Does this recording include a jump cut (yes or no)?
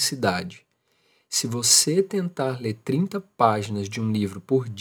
no